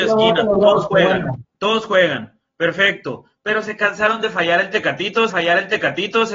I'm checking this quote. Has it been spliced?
yes; 2 cuts; at 1.5 s, 5.3 s

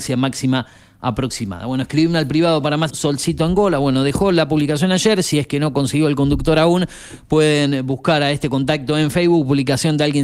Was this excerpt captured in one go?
no; 1 cut; at 2.9 s

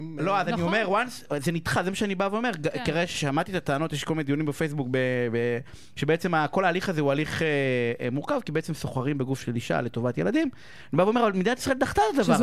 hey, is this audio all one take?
yes; 0 cuts

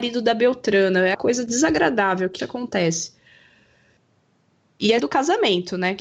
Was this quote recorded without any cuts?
no; 3 cuts; at 1.1 s, 2.4 s, 5.0 s

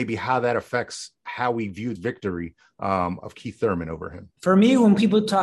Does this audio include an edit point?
yes; 2 cuts; at 2.0 s, 4.4 s

